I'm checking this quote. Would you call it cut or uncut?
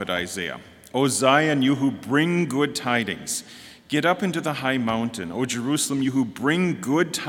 uncut